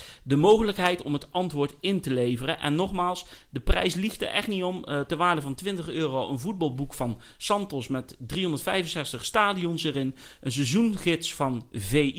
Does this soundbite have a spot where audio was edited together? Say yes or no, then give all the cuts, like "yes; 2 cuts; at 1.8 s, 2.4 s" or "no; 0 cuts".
no; 0 cuts